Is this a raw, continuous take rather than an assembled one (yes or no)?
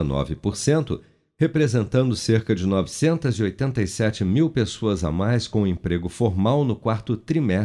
yes